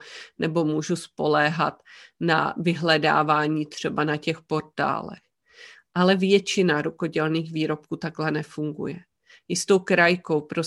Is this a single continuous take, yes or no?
yes